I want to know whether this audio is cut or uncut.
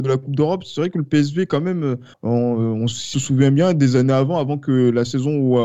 cut